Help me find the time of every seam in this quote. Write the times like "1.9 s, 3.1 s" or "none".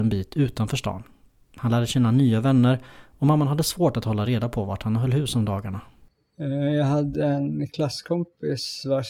none